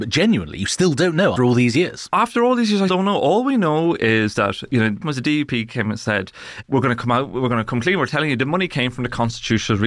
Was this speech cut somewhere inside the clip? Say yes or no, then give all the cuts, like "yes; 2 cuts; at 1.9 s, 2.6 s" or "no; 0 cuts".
yes; 3 cuts; at 1.4 s, 2.9 s, 5.0 s